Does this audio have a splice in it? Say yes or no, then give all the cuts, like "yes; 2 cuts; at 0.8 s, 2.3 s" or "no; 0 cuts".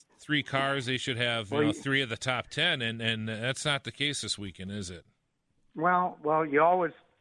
no; 0 cuts